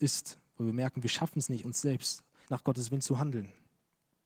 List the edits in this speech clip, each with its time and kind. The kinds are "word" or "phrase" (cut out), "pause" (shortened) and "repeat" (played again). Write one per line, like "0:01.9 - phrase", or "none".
0:01.6 - word
0:02.5 - word

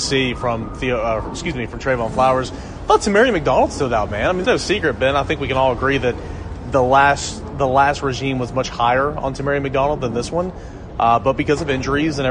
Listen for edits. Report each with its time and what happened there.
0:04.4 - phrase

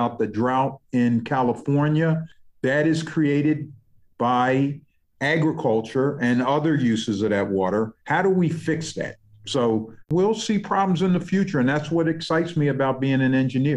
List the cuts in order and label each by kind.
none

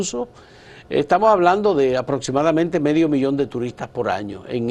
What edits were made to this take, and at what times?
none

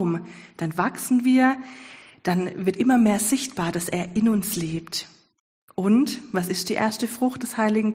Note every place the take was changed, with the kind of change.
none

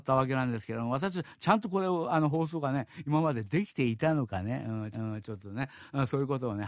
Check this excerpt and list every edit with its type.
0:04.9 - repeat

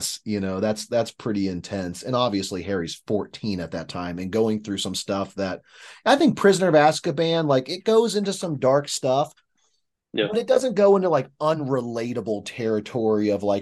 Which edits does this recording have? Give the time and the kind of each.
none

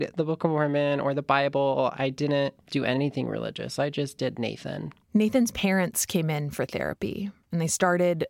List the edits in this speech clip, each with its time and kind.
0:02.6 - pause
0:05.0 - pause
0:07.4 - pause

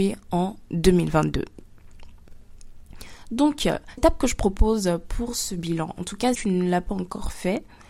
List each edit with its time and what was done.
0:04.0 - word
0:06.3 - word

